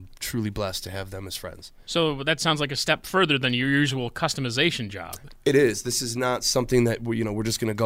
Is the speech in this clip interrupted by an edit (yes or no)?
no